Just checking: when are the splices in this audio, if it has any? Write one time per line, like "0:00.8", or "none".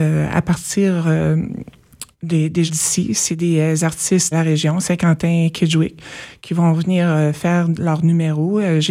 0:02.7
0:04.3